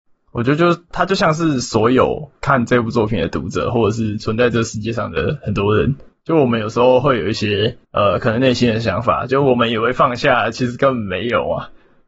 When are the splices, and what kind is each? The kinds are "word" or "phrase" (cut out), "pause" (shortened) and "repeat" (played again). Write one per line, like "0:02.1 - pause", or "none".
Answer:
0:02.4 - pause
0:07.8 - pause